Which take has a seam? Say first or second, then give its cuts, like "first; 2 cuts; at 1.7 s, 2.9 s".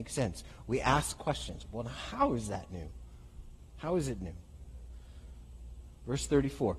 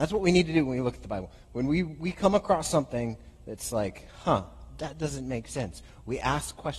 first; 1 cut; at 3.6 s